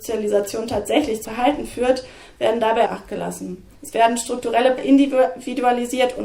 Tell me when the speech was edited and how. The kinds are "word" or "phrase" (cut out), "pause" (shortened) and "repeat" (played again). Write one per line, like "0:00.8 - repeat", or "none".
0:01.2 - word
0:02.9 - phrase
0:03.8 - pause
0:04.8 - word